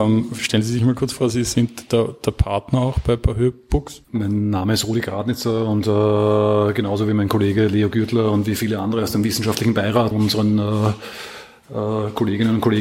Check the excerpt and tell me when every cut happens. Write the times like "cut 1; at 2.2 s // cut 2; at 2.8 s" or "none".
cut 1; at 4.0 s // cut 2; at 10.1 s